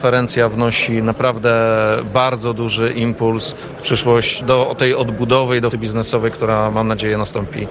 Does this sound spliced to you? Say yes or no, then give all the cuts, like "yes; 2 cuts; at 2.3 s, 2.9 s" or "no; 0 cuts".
yes; 2 cuts; at 4.4 s, 5.7 s